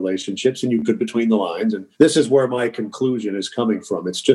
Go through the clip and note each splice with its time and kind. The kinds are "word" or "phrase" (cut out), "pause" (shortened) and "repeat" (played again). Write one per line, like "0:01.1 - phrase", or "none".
0:01.0 - word
0:01.9 - pause